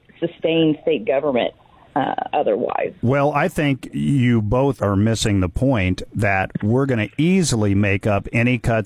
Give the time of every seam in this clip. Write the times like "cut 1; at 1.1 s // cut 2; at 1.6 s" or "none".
cut 1; at 4.8 s